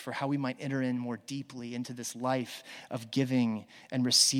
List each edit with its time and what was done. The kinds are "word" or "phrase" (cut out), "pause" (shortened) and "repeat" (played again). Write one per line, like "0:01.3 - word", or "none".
none